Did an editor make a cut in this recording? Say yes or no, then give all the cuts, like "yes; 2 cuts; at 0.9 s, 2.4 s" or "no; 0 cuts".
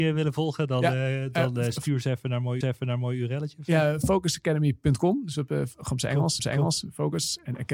yes; 2 cuts; at 2.6 s, 6.4 s